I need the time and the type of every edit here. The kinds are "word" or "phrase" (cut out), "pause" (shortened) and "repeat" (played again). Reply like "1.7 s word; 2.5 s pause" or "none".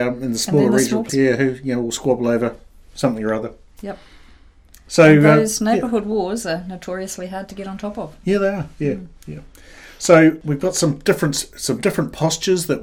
1.1 s word